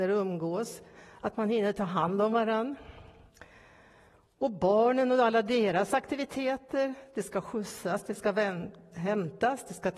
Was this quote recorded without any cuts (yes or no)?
yes